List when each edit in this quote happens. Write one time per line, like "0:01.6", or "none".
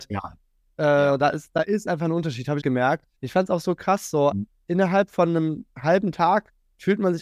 0:02.6
0:03.2
0:04.3